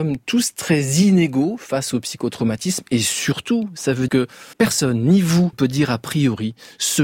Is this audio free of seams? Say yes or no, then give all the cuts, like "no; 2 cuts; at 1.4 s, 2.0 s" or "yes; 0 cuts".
no; 3 cuts; at 4.1 s, 4.5 s, 5.5 s